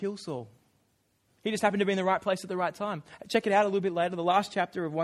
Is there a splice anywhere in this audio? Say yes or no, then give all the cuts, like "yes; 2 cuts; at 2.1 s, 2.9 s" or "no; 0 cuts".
no; 0 cuts